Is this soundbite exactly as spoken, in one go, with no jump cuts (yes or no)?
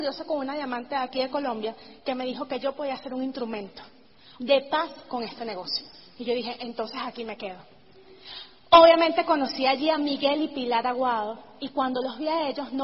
yes